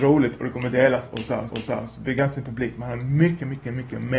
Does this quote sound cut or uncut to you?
cut